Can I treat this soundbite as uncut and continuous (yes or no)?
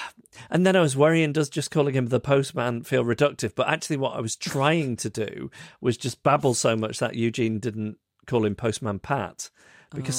yes